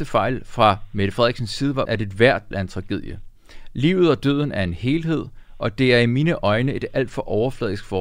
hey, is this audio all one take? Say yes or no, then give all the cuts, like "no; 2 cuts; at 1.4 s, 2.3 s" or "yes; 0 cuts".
no; 2 cuts; at 1.8 s, 2.5 s